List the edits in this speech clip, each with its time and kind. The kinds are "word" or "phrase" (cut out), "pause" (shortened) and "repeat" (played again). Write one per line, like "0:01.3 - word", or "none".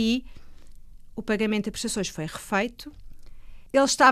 none